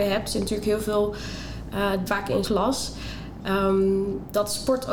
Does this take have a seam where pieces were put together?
yes; 2 cuts; at 2.1 s, 2.4 s

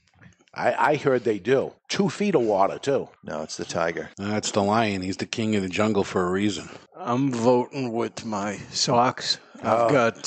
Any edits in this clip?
yes; 4 cuts; at 1.8 s, 3.2 s, 4.1 s, 6.9 s

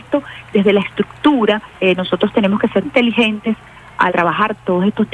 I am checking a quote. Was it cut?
yes; 3 cuts; at 1.7 s, 2.8 s, 4.1 s

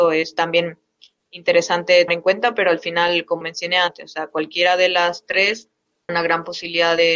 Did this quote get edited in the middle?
yes; 3 cuts; at 2.1 s, 3.4 s, 6.1 s

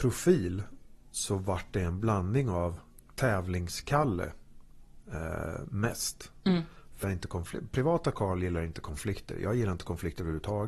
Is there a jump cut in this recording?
yes; 2 cuts; at 3.0 s, 7.0 s

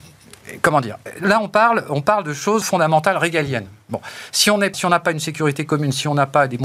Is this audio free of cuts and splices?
no; 2 cuts; at 2.6 s, 4.7 s

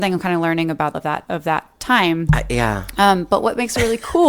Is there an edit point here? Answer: yes; 2 cuts; at 0.9 s, 1.3 s

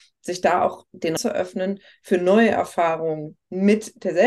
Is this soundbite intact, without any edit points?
no; 1 cut; at 1.2 s

